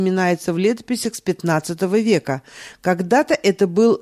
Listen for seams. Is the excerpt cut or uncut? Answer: uncut